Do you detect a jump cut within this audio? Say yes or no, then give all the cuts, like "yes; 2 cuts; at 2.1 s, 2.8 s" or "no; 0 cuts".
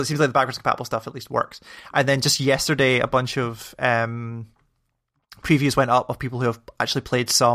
no; 0 cuts